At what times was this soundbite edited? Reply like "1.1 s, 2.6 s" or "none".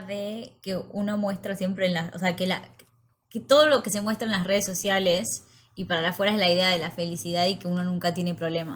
none